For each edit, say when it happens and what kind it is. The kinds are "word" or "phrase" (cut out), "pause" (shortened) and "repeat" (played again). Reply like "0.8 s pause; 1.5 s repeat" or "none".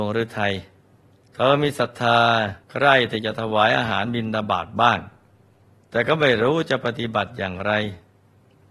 1.1 s pause; 2.6 s pause; 5.6 s pause